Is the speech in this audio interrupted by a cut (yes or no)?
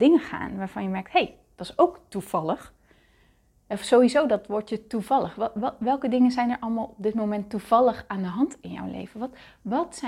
no